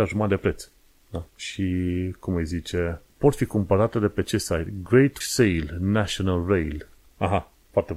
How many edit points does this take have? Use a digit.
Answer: 3